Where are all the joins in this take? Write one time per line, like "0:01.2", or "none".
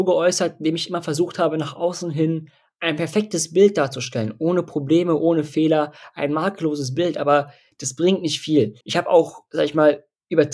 0:08.8

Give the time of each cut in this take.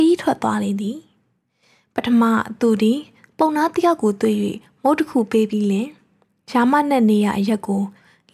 none

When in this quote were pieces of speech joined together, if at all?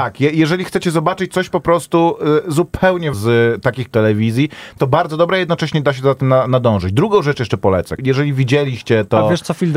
0:03.1
0:03.9
0:04.8
0:08.0

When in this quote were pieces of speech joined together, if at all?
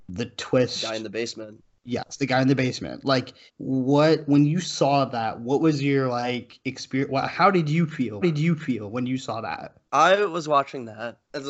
0:03.5
0:08.2
0:09.9

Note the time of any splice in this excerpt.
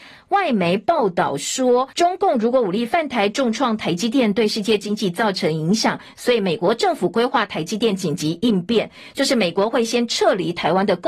0:01.9

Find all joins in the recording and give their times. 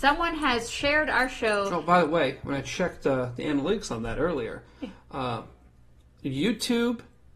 none

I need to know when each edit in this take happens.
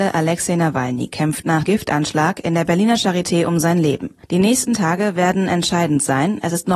0:01.7
0:04.2

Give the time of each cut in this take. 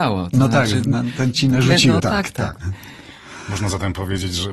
0:01.3
0:02.0
0:02.6

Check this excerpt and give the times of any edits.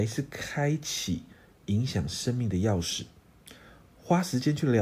none

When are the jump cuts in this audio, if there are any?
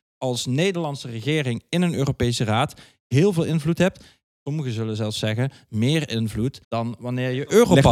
0:06.6

